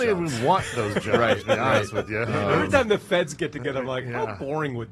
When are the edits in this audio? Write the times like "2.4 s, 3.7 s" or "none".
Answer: none

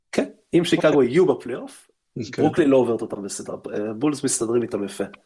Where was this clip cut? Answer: none

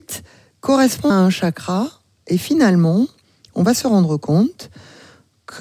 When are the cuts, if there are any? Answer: 1.1 s

